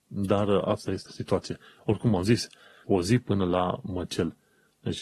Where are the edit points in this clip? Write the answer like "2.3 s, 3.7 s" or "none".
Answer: 1.1 s, 2.8 s